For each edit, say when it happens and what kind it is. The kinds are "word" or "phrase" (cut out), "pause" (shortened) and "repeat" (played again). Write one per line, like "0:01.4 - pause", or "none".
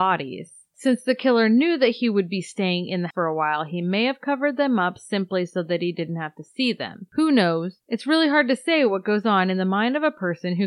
0:03.1 - word